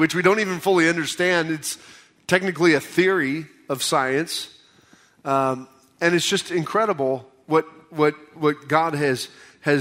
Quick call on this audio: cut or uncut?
uncut